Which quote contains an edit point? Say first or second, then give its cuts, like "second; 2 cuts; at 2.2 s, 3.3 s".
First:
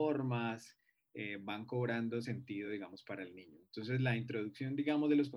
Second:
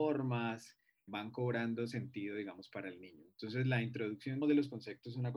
second; 2 cuts; at 1.1 s, 4.4 s